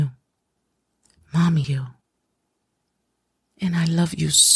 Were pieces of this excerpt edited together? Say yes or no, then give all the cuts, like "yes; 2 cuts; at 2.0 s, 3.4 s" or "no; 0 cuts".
yes; 1 cut; at 1.6 s